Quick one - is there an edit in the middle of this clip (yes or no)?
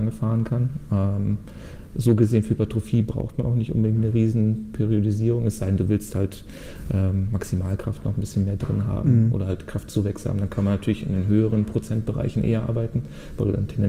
no